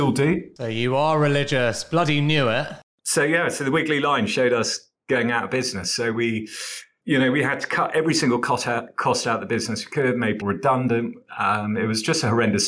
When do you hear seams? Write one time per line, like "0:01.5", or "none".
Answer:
0:10.4